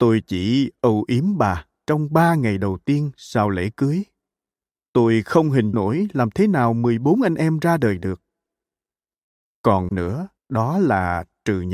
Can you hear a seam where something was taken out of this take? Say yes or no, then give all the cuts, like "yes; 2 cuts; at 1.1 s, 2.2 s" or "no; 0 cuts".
yes; 3 cuts; at 5.7 s, 9.9 s, 10.4 s